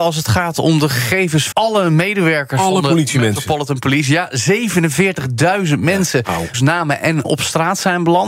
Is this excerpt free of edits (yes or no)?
no